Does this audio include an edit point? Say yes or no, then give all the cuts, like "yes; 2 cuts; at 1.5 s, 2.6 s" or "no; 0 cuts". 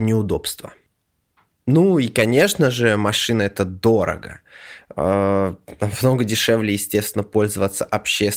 no; 0 cuts